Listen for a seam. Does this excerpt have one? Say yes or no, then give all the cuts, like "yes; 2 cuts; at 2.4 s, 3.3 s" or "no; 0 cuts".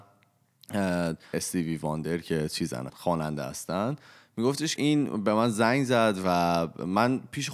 yes; 3 cuts; at 1.3 s, 2.9 s, 4.8 s